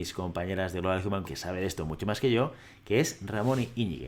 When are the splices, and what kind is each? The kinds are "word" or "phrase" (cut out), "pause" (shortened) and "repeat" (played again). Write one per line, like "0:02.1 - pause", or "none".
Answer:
0:01.2 - word